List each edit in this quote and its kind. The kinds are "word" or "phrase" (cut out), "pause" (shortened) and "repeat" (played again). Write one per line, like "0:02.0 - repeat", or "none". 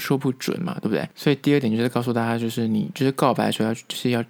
0:01.1 - pause